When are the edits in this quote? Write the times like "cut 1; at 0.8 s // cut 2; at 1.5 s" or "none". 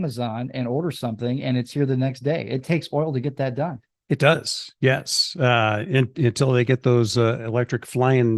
none